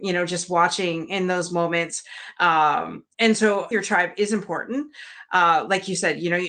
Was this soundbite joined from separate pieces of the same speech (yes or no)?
yes